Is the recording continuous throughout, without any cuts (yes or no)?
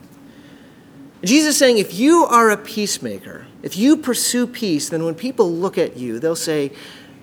no